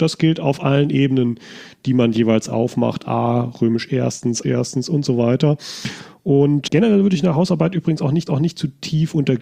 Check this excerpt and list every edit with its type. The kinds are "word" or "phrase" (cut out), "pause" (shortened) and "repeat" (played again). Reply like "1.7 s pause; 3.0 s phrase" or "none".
4.4 s word; 6.7 s word; 8.3 s repeat